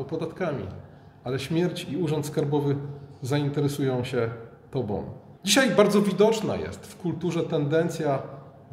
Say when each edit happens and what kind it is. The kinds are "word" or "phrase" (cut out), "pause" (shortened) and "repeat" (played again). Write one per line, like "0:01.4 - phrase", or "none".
0:05.4 - pause